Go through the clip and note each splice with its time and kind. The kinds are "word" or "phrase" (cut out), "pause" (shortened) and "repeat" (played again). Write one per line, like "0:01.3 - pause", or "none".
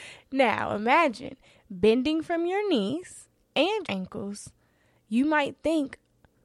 0:03.9 - word